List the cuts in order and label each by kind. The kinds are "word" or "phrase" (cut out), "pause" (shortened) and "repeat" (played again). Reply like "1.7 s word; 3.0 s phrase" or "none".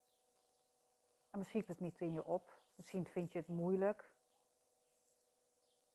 1.7 s word; 2.7 s pause